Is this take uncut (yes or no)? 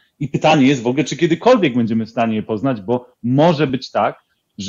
yes